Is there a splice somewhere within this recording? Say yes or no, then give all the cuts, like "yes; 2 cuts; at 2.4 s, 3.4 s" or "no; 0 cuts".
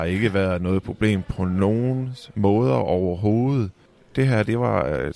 yes; 1 cut; at 3.9 s